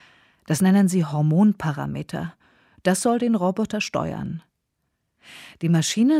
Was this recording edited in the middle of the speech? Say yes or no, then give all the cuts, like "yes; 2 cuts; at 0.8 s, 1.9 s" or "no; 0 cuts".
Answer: no; 0 cuts